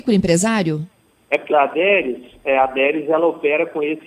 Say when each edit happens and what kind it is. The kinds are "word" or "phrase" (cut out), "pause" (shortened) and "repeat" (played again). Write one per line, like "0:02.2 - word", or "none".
0:01.5 - phrase
0:02.4 - word